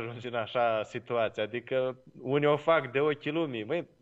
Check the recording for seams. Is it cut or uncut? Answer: uncut